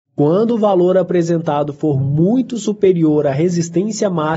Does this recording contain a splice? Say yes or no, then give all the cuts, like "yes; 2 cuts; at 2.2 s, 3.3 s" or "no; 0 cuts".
no; 0 cuts